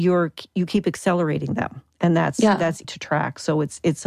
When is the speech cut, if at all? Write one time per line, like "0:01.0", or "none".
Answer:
0:02.8